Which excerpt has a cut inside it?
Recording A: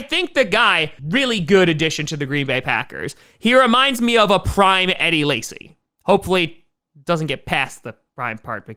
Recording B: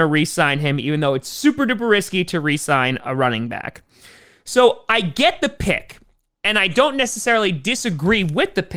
A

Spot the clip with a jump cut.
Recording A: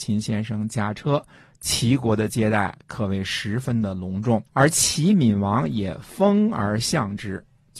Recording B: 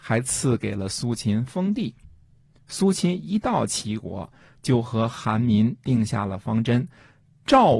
A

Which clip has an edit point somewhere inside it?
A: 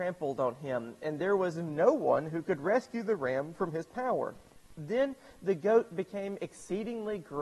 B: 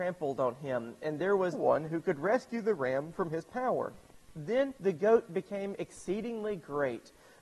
B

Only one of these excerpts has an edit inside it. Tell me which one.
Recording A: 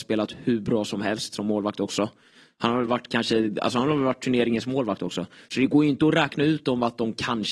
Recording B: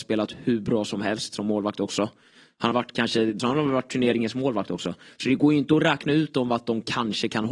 B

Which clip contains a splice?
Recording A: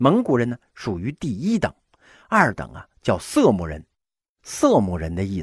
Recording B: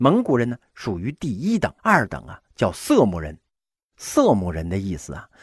B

